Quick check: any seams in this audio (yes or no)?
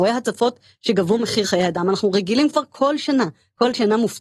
no